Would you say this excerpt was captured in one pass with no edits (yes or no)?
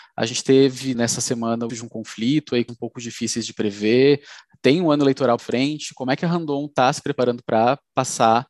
no